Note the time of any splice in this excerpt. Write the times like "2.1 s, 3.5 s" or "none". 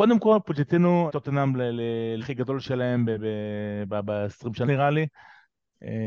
1.1 s, 2.2 s, 4.6 s